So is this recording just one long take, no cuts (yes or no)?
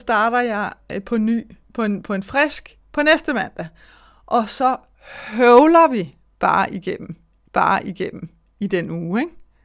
no